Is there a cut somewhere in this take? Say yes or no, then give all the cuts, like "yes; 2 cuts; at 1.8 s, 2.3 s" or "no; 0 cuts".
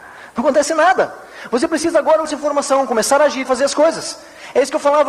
yes; 2 cuts; at 2.2 s, 3.4 s